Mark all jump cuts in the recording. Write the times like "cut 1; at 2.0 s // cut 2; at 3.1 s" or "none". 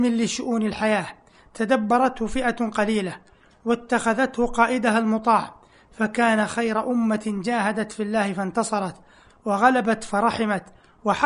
none